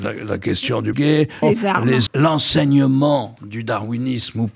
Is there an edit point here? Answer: yes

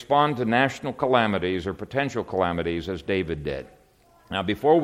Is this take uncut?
yes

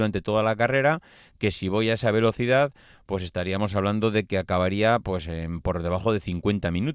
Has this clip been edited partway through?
no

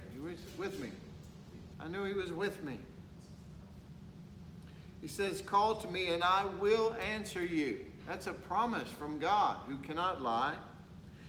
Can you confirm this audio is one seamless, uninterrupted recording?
yes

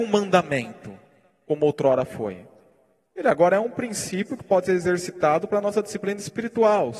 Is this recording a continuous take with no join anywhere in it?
yes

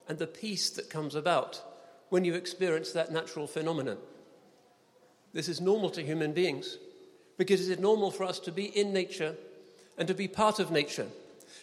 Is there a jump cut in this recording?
no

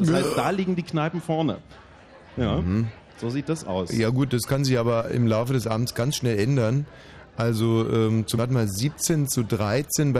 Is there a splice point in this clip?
yes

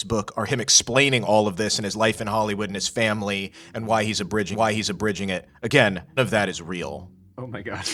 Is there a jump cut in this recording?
yes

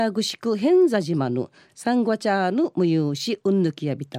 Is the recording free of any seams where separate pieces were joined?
yes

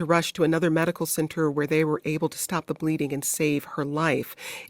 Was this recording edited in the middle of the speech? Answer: no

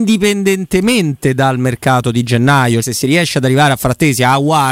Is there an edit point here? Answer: yes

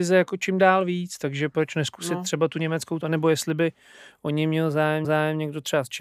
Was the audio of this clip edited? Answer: yes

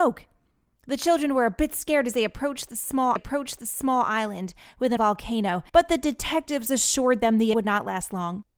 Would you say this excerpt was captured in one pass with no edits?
no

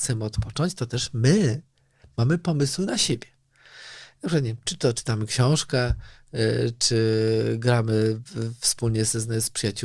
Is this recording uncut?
yes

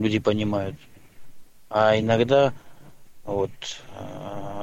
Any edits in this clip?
no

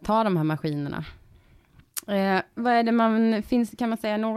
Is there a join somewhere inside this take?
yes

